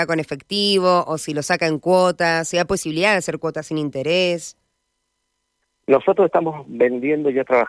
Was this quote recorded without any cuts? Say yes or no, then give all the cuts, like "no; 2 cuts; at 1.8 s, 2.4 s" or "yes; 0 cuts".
yes; 0 cuts